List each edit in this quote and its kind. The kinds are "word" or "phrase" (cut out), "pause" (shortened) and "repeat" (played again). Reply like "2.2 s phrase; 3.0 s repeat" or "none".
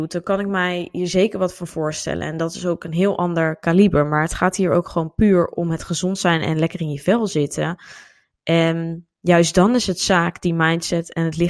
none